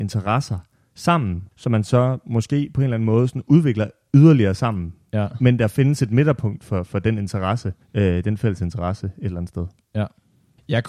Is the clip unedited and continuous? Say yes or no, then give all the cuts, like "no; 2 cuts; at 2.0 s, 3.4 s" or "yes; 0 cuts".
no; 2 cuts; at 1.5 s, 7.8 s